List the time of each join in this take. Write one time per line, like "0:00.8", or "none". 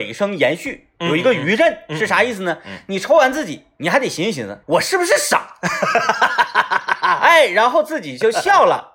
0:04.6